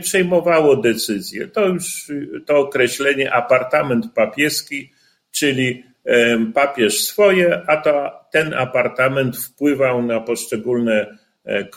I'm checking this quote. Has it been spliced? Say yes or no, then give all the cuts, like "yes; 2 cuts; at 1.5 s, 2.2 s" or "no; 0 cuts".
no; 0 cuts